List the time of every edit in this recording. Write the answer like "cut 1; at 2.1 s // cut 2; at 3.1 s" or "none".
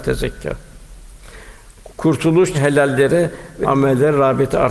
cut 1; at 2.5 s // cut 2; at 3.6 s